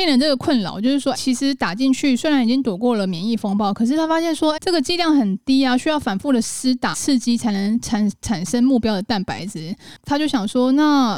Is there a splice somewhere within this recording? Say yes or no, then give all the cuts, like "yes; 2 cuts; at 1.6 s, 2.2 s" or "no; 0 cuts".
yes; 3 cuts; at 1.1 s, 4.6 s, 6.9 s